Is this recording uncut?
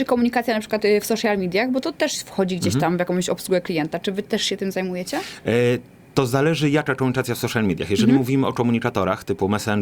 yes; 0 cuts

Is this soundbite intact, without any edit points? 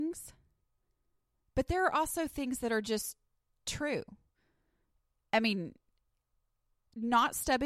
yes; 0 cuts

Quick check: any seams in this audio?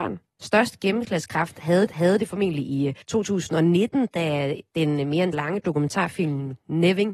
yes; 3 cuts; at 1.9 s, 3.0 s, 5.3 s

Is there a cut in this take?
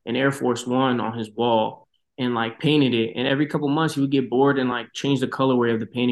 no; 0 cuts

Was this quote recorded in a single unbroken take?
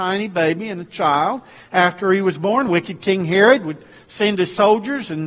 yes; 0 cuts

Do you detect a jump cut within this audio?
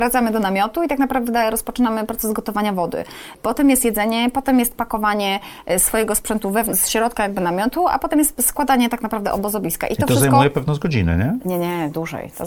yes; 1 cut; at 6.7 s

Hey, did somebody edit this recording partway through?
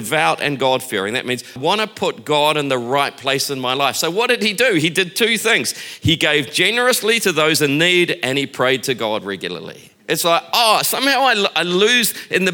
yes; 2 cuts; at 1.6 s, 10.0 s

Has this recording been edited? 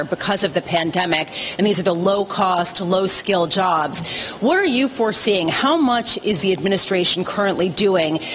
no; 0 cuts

